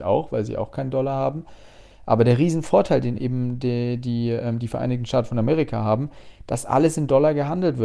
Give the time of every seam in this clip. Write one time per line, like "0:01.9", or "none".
none